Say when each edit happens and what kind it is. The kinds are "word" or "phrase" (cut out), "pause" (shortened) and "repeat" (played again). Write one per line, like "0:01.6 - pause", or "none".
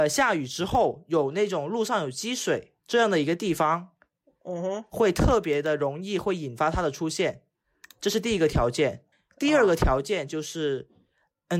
0:02.8 - pause
0:09.1 - pause